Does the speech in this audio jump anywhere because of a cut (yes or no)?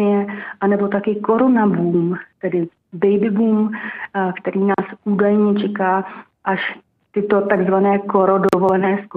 no